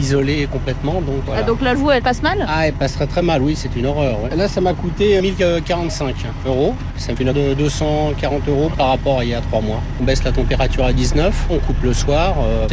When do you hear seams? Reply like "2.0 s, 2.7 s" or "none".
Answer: 1.7 s, 5.2 s, 7.3 s